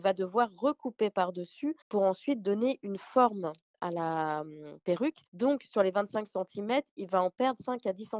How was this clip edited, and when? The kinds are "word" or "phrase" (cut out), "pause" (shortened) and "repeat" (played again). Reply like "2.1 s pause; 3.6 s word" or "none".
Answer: 1.8 s pause; 5.3 s pause